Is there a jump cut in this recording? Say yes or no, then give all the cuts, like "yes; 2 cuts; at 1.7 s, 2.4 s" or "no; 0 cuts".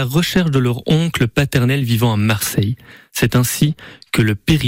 no; 0 cuts